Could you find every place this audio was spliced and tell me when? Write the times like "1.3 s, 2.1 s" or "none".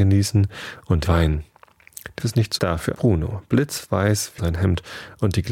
1.0 s, 2.2 s, 2.6 s, 2.9 s, 4.4 s